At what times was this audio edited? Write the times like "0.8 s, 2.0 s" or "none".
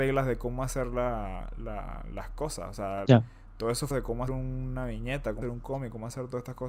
3.1 s, 3.9 s, 4.3 s, 5.4 s